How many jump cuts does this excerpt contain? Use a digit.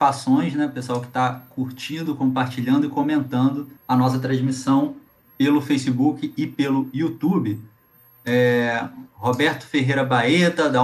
1